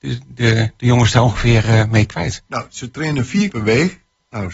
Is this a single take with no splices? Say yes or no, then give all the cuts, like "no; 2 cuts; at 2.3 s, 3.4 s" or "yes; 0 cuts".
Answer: no; 1 cut; at 3.5 s